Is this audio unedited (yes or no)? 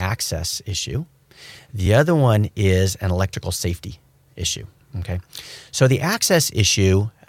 yes